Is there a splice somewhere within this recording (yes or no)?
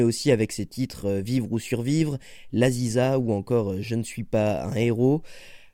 no